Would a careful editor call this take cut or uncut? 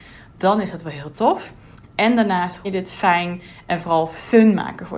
cut